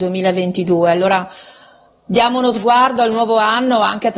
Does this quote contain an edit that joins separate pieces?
no; 0 cuts

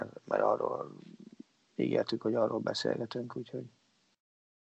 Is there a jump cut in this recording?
no; 0 cuts

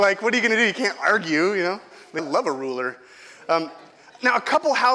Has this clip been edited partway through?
yes; 1 cut; at 2.2 s

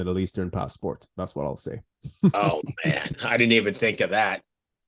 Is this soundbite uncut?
yes; 0 cuts

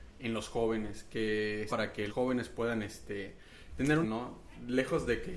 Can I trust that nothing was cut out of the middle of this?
no; 3 cuts; at 1.7 s, 2.1 s, 4.0 s

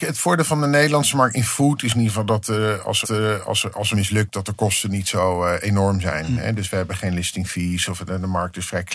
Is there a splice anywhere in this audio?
yes; 2 cuts; at 3.0 s, 3.9 s

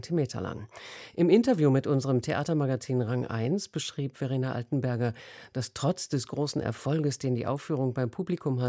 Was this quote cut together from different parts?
no; 0 cuts

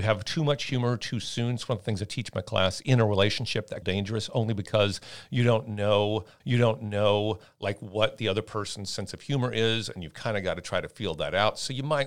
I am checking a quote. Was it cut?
yes; 2 cuts; at 3.8 s, 6.4 s

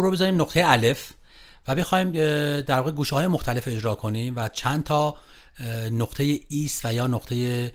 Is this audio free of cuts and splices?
yes; 0 cuts

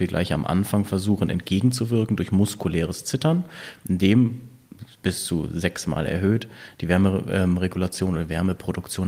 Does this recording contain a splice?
no; 0 cuts

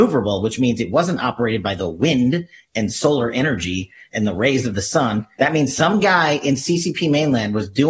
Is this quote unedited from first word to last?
yes; 0 cuts

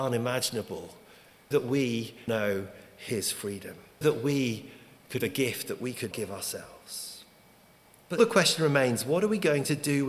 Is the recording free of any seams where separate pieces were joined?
no; 6 cuts; at 1.5 s, 2.3 s, 4.0 s, 5.2 s, 6.1 s, 8.2 s

